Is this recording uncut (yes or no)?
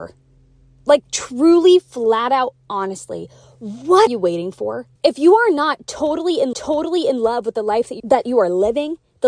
no